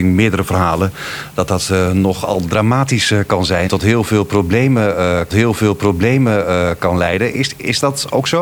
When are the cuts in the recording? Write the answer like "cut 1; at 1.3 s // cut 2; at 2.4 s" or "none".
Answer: cut 1; at 3.7 s // cut 2; at 5.3 s

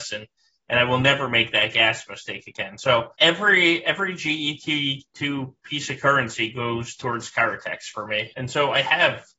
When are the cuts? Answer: cut 1; at 3.1 s // cut 2; at 5.6 s // cut 3; at 8.3 s

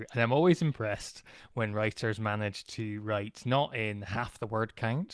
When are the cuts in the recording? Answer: none

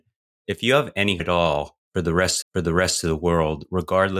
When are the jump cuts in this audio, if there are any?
cut 1; at 1.2 s // cut 2; at 2.4 s

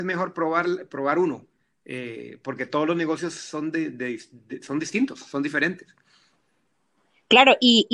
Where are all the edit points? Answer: none

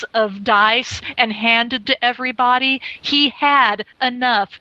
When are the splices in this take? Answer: cut 1; at 1.8 s

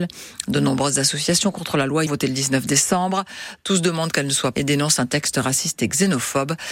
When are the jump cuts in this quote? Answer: cut 1; at 2.1 s // cut 2; at 4.6 s

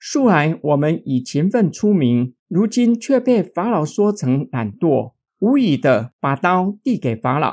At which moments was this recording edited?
cut 1; at 2.4 s

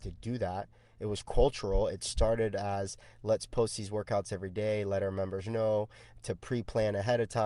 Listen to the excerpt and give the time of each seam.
none

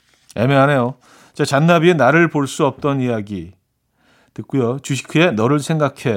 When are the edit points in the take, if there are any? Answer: none

